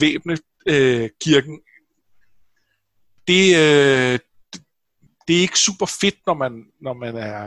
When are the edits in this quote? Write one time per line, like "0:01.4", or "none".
none